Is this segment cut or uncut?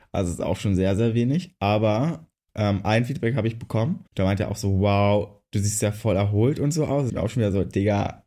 cut